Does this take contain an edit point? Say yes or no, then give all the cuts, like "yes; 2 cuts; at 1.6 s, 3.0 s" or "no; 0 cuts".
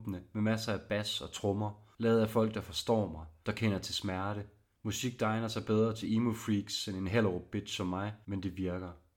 yes; 2 cuts; at 4.7 s, 8.2 s